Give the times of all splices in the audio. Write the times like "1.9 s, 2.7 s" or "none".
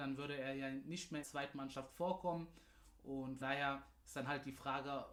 1.2 s, 3.4 s